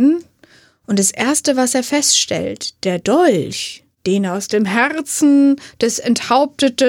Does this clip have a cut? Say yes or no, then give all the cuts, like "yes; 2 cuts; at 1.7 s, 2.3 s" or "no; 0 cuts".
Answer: yes; 1 cut; at 3.9 s